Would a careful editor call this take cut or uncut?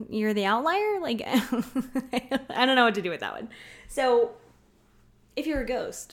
uncut